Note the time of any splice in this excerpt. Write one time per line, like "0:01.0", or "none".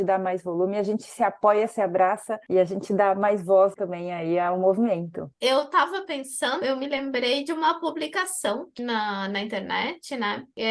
0:03.7
0:05.3
0:06.6
0:08.8